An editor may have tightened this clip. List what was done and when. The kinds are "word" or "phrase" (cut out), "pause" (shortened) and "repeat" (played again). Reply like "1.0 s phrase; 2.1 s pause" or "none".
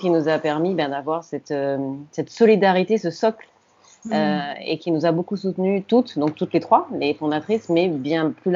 none